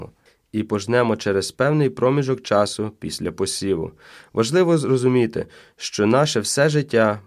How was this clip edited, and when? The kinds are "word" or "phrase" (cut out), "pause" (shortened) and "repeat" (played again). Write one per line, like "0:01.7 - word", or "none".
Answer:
none